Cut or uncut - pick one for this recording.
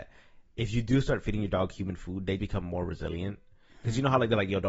cut